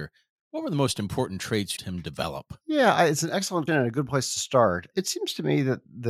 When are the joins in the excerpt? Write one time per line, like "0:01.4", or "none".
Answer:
0:01.8
0:02.6
0:03.7